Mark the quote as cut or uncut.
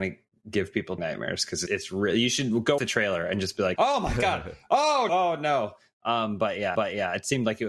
cut